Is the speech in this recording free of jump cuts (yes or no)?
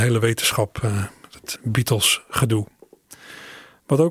no